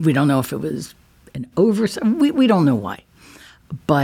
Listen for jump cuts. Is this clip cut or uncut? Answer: uncut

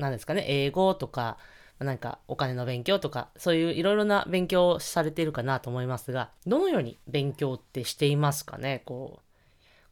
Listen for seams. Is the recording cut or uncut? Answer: cut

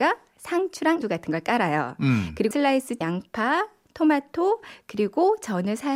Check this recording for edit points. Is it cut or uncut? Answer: cut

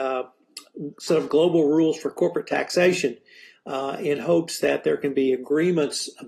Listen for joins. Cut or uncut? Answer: uncut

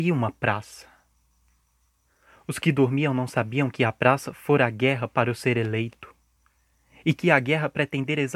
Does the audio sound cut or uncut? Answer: uncut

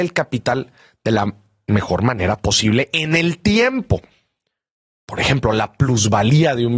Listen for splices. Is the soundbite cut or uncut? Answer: uncut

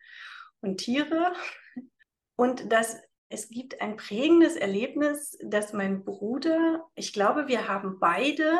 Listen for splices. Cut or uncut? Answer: uncut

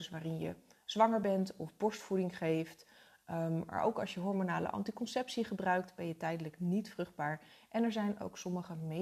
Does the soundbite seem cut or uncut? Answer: uncut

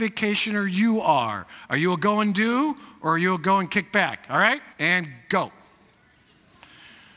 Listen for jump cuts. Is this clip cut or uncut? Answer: cut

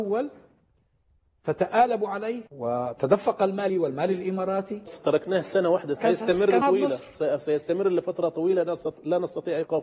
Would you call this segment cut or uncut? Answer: cut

